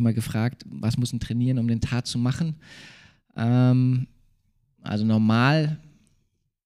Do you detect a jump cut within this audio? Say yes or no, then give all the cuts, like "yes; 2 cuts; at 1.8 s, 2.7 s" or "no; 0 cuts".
no; 0 cuts